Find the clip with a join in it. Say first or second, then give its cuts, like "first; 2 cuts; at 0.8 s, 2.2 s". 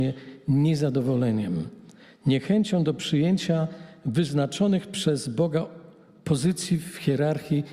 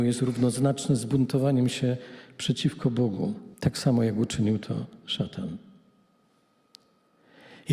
second; 1 cut; at 3.5 s